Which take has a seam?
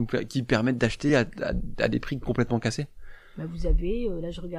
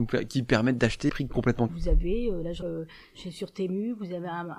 second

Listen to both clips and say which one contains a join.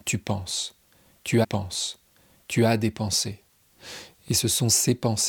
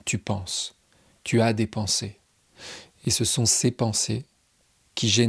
first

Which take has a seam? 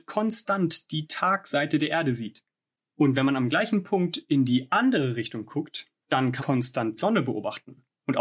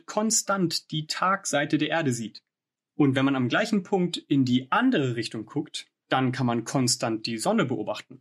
first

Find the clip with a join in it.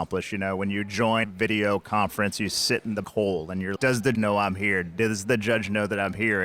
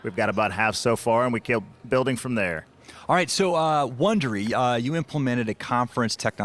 first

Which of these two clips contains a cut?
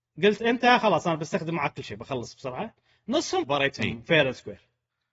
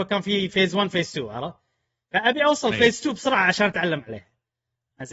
first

